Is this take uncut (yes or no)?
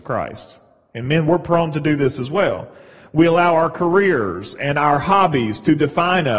yes